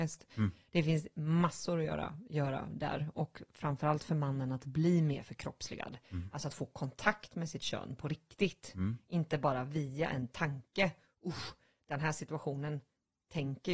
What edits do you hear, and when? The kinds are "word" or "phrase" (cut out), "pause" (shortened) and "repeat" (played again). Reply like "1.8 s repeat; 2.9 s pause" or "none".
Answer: none